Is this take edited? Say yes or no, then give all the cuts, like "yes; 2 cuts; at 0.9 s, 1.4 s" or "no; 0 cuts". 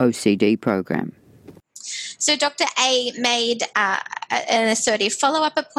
no; 0 cuts